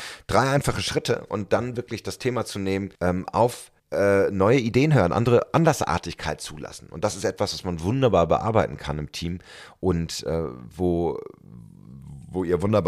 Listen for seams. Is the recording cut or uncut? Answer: cut